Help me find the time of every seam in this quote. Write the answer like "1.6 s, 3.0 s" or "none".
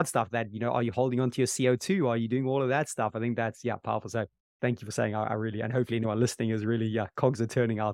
none